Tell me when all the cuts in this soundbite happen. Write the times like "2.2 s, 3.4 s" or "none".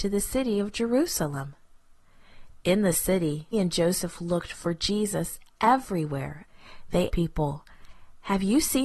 3.5 s, 7.1 s